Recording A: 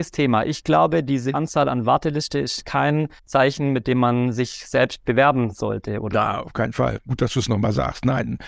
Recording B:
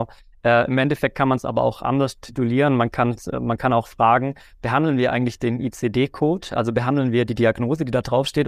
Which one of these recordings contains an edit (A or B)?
A